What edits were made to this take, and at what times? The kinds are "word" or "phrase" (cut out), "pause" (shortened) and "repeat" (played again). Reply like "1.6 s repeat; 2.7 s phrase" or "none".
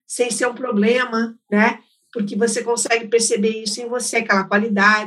none